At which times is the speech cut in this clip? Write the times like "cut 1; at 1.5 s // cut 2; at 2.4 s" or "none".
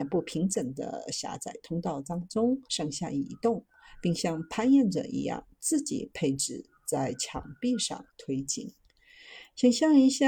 cut 1; at 2.7 s // cut 2; at 8.1 s